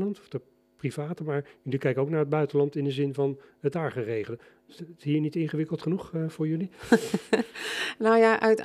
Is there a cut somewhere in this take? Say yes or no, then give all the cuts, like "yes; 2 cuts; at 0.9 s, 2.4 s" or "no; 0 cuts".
no; 0 cuts